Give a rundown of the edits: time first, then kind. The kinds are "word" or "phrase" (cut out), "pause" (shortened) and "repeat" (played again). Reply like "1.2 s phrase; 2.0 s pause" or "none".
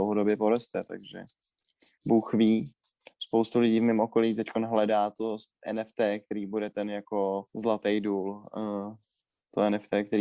2.0 s pause; 7.5 s pause